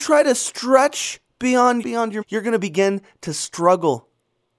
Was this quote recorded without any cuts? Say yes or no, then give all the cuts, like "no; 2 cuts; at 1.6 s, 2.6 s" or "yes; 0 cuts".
no; 2 cuts; at 1.8 s, 2.2 s